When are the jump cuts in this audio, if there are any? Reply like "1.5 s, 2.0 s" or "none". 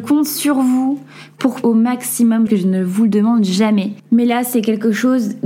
1.6 s, 2.5 s